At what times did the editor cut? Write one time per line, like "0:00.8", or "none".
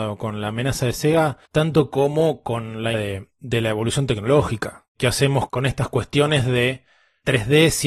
0:01.5
0:02.9
0:04.9